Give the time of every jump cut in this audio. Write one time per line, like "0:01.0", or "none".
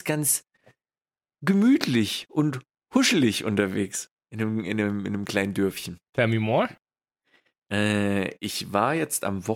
0:06.1